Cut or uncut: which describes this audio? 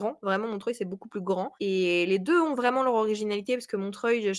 cut